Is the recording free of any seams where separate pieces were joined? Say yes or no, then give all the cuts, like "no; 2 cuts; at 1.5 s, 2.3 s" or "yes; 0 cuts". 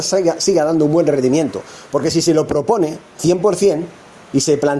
no; 1 cut; at 3.2 s